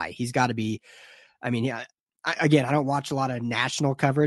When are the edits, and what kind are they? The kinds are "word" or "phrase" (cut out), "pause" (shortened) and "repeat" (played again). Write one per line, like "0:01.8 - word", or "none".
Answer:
none